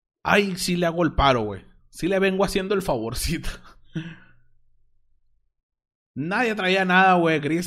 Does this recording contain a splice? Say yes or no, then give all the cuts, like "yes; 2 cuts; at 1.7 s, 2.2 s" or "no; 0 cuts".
no; 0 cuts